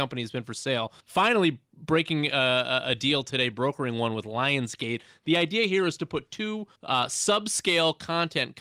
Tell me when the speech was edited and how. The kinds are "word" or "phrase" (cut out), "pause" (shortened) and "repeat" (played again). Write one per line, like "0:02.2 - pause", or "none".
0:01.0 - pause
0:06.8 - pause

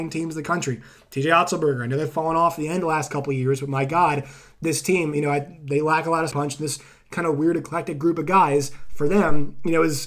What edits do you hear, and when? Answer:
0:06.3 - word

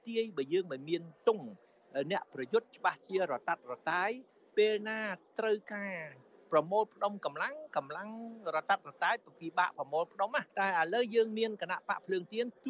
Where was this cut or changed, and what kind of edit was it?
0:10.5 - pause

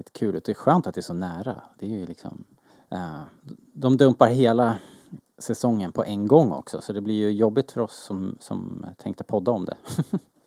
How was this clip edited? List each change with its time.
0:02.7 - pause

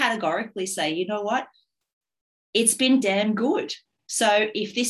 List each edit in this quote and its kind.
0:03.0 - word

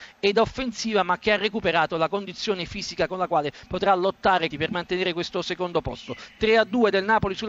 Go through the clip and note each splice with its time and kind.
0:04.5 - phrase

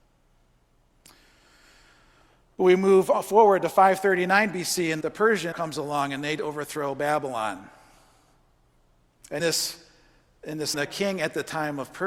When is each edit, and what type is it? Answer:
0:05.0 - word
0:05.5 - word
0:09.4 - word
0:10.7 - word

